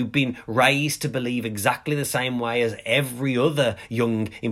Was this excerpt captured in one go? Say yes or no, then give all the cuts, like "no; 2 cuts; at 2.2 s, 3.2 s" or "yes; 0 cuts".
yes; 0 cuts